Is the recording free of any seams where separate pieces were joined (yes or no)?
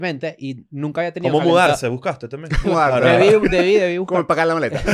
no